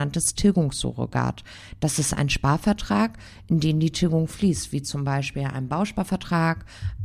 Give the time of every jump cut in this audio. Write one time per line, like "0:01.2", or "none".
none